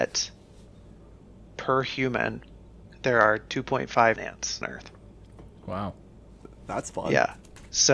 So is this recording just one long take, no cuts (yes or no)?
no